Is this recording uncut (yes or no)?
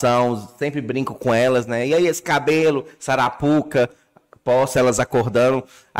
yes